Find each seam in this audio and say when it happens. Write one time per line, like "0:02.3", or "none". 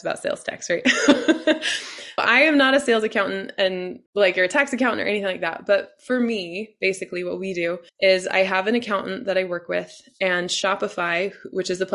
0:02.2
0:04.1
0:07.9